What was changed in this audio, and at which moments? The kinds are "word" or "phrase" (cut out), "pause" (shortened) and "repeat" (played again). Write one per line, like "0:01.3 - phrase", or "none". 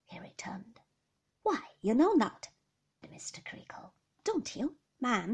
0:03.0 - word